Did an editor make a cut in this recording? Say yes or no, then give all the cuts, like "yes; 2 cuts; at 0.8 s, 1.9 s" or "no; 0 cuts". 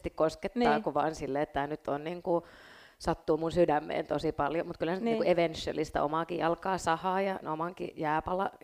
yes; 1 cut; at 7.4 s